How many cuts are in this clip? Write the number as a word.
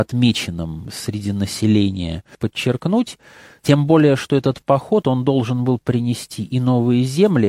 zero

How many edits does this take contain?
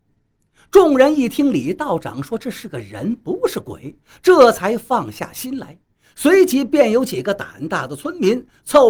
zero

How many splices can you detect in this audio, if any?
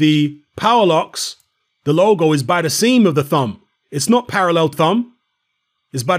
one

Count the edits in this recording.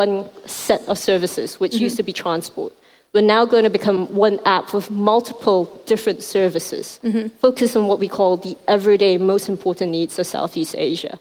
zero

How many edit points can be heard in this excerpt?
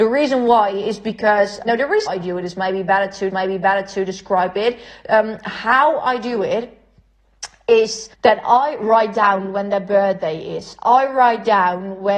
four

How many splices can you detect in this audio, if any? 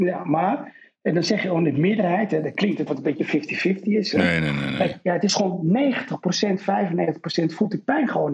one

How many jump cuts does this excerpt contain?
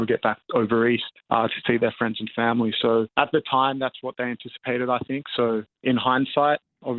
three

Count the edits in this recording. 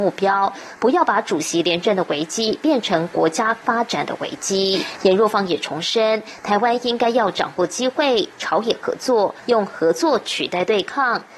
zero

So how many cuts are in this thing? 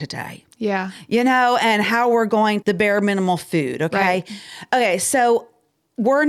one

